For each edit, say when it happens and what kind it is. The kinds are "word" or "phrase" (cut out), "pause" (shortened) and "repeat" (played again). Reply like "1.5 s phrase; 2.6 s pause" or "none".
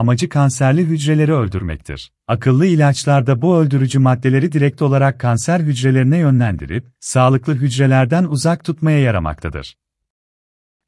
2.2 s pause